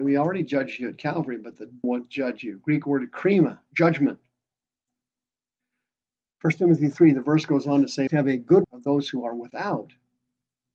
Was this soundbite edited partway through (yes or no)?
yes